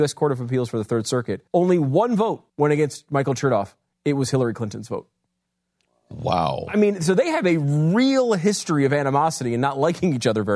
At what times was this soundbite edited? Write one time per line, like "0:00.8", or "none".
0:01.5
0:02.5